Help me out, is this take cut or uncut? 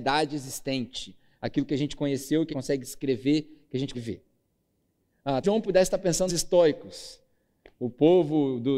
cut